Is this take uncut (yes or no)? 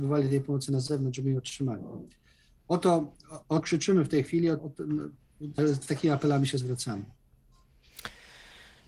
no